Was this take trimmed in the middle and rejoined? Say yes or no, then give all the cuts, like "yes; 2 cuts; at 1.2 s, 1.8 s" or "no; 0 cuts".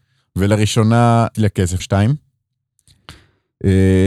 yes; 2 cuts; at 1.3 s, 1.8 s